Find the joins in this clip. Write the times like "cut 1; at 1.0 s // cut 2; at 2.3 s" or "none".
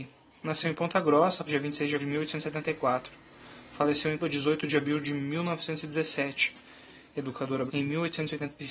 cut 1; at 1.5 s // cut 2; at 2.0 s // cut 3; at 4.2 s // cut 4; at 7.7 s